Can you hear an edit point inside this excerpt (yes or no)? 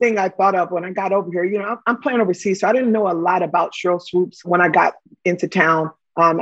no